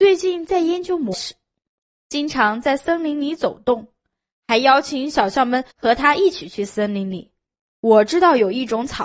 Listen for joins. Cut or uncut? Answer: cut